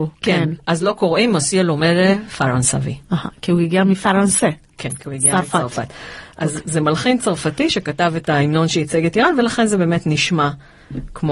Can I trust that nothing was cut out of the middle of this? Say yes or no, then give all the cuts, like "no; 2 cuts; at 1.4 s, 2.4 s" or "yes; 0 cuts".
yes; 0 cuts